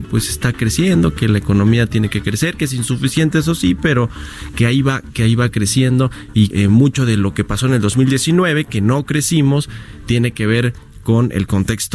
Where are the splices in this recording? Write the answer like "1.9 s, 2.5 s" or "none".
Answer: 6.5 s